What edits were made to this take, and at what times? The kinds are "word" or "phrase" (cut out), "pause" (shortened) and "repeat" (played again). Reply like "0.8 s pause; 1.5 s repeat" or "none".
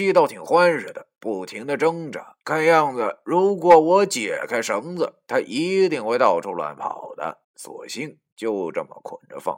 2.4 s pause; 7.4 s pause